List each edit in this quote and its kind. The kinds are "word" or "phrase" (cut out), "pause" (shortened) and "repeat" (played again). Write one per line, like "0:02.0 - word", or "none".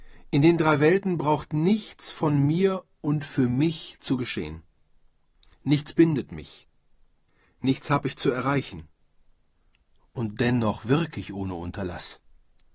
none